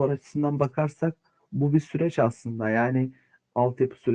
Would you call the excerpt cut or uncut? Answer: uncut